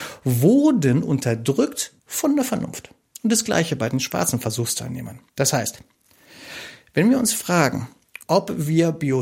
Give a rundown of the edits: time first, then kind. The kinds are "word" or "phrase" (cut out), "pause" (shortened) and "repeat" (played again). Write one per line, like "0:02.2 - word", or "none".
0:02.0 - pause
0:03.1 - pause
0:05.3 - pause
0:08.2 - pause